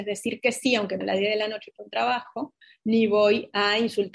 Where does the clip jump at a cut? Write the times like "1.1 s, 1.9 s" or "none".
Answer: 1.0 s, 2.6 s